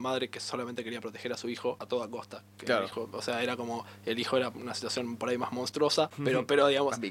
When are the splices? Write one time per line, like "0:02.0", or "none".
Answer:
none